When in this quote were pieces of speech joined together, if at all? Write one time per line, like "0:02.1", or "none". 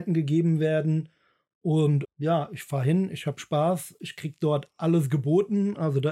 0:02.0